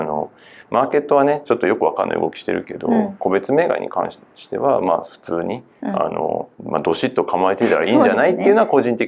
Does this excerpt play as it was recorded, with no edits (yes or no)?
no